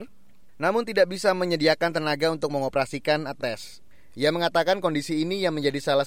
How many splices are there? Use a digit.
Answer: 1